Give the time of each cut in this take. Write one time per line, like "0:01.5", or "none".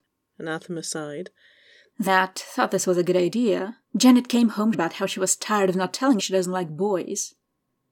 0:02.1
0:03.8
0:04.7
0:06.2